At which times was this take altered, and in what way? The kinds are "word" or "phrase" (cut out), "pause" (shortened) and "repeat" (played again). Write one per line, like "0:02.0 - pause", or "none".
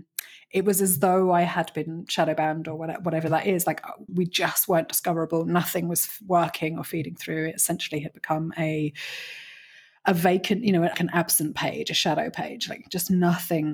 0:04.1 - word
0:10.9 - word